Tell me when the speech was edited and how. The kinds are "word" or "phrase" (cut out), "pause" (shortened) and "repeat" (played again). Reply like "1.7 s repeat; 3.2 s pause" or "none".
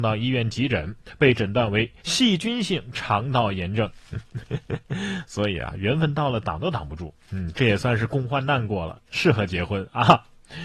2.0 s pause; 9.1 s pause